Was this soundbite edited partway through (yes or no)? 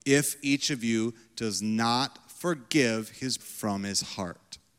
yes